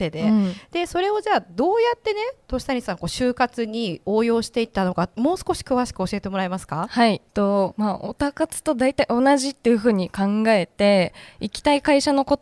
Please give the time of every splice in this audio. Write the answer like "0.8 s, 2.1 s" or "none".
7.3 s